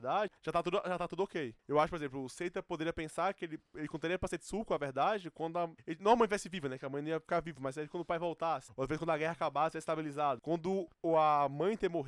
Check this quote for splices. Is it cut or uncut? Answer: uncut